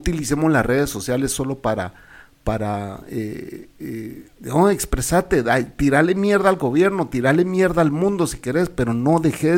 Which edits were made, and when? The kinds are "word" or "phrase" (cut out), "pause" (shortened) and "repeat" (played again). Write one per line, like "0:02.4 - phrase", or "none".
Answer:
none